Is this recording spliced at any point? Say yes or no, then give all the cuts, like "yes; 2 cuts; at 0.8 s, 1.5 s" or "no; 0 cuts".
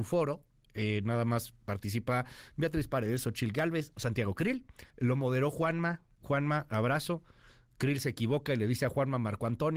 yes; 2 cuts; at 3.9 s, 4.9 s